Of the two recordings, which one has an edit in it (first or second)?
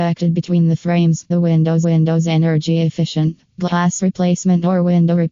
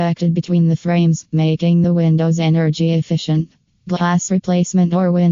first